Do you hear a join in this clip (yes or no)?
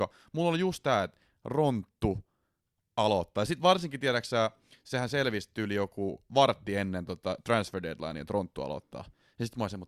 no